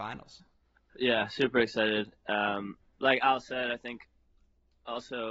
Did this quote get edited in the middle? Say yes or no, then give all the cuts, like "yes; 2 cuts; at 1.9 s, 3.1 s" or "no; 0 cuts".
no; 0 cuts